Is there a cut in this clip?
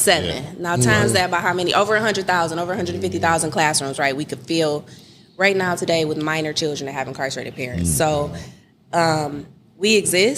no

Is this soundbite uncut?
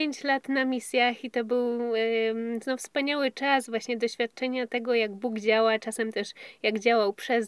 yes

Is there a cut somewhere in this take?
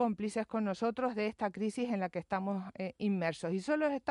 no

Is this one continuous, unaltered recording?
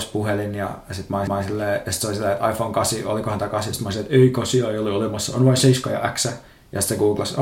no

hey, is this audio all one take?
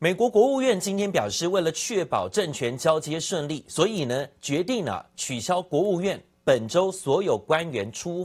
yes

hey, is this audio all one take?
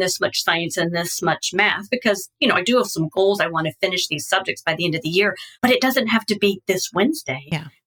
no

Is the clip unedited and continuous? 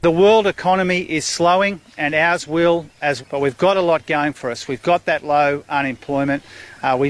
no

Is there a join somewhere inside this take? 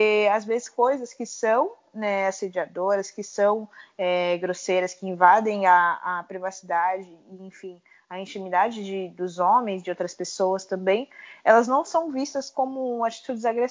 no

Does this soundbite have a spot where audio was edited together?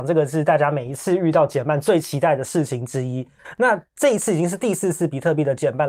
no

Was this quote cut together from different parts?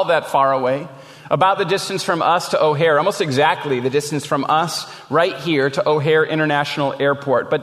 no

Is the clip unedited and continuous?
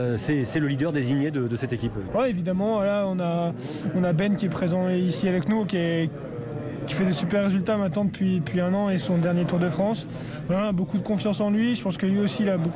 no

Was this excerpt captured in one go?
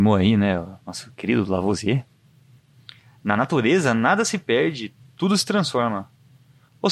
yes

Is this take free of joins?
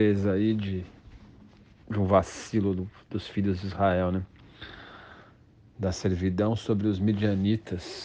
yes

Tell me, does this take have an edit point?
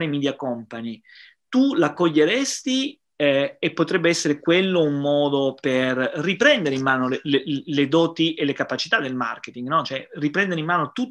no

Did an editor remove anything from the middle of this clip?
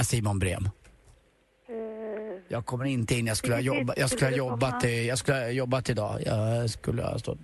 no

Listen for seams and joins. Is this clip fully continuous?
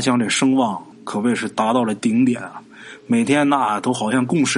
no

